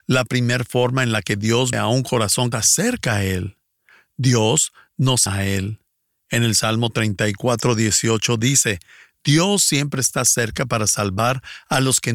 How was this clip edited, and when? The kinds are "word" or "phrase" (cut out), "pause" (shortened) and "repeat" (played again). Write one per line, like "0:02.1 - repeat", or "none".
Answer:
0:01.7 - word
0:02.5 - phrase
0:05.3 - word